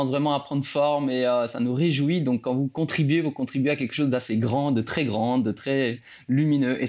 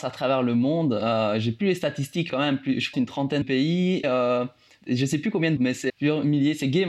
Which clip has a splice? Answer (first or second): second